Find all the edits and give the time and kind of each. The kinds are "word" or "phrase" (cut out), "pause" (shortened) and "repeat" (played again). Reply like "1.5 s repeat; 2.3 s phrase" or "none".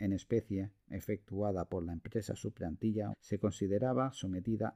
3.1 s phrase